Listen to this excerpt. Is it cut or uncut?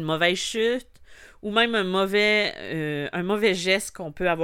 uncut